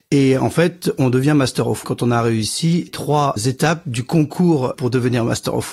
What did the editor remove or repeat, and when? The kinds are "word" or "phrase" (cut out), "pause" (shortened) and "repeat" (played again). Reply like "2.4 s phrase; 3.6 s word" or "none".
1.8 s word; 2.9 s word; 3.4 s word; 4.7 s word